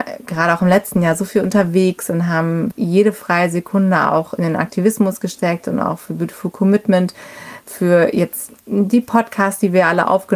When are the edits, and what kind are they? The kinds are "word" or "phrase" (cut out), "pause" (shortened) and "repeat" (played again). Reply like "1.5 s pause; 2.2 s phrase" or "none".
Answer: 2.7 s word; 8.6 s pause